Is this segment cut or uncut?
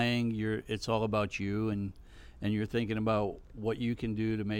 uncut